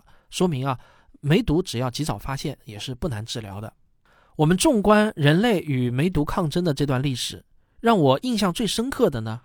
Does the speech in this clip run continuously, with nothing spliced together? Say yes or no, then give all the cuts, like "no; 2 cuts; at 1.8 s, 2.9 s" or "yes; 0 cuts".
yes; 0 cuts